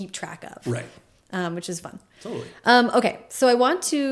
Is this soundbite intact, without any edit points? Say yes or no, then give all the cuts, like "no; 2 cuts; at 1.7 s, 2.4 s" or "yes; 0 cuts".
yes; 0 cuts